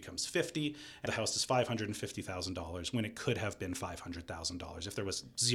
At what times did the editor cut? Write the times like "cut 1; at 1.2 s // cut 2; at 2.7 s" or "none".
cut 1; at 1.1 s